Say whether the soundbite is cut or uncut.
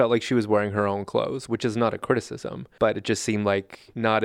uncut